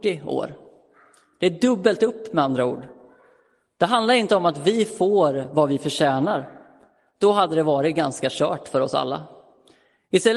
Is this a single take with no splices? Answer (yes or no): yes